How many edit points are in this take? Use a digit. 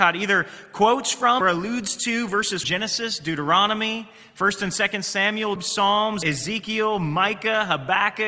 4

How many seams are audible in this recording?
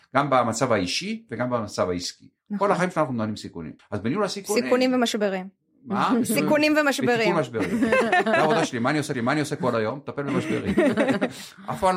2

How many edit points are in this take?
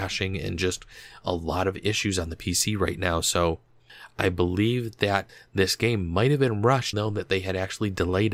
1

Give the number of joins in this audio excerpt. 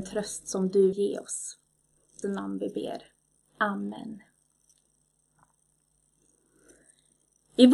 2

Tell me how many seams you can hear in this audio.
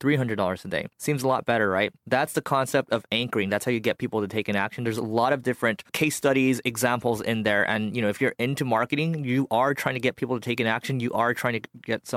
3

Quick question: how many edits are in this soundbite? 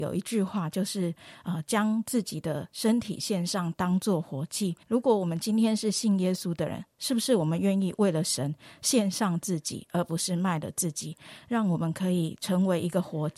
1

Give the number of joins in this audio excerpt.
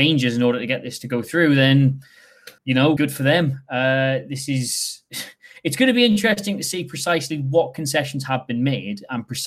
2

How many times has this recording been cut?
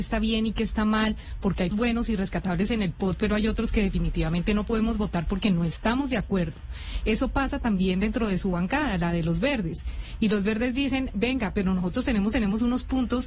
2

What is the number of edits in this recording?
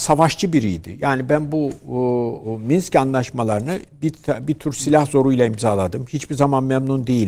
0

